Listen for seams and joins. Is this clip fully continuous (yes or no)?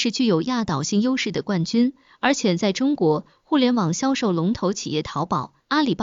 yes